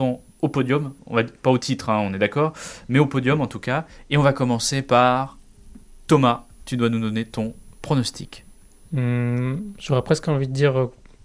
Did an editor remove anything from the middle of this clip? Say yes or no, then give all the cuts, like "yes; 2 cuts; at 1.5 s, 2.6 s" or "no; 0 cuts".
no; 0 cuts